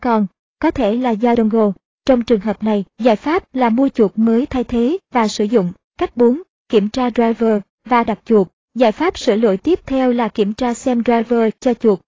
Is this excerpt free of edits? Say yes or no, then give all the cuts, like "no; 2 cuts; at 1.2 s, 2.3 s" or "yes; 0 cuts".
no; 3 cuts; at 1.3 s, 2.9 s, 8.1 s